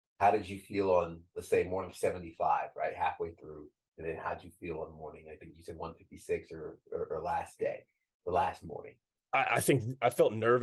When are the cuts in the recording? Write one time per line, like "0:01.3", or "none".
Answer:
0:09.0